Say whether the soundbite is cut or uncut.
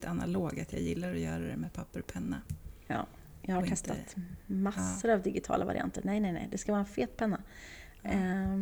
uncut